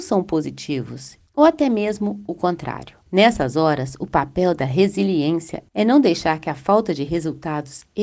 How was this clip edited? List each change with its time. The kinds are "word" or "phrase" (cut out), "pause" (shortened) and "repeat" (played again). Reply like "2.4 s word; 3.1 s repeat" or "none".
1.3 s pause; 3.1 s pause